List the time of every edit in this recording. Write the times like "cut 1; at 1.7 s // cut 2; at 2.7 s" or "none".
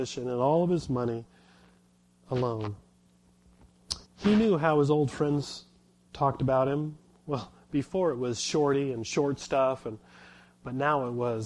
cut 1; at 4.1 s